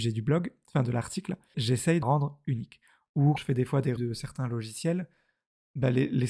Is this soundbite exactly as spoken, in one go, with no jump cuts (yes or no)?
no